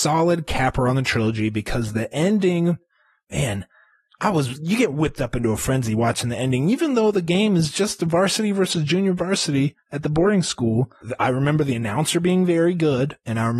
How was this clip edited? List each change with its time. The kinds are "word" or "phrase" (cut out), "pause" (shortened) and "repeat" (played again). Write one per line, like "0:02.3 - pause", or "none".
0:11.0 - word